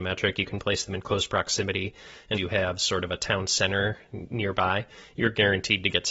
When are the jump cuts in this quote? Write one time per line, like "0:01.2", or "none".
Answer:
0:02.3